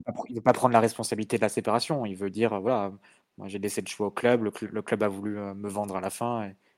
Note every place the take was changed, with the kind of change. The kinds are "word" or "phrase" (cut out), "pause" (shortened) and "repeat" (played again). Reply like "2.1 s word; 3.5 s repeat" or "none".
none